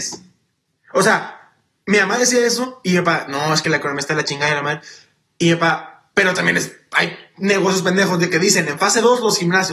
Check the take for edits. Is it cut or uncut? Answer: uncut